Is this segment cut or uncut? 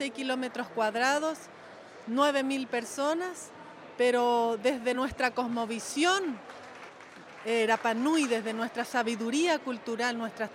uncut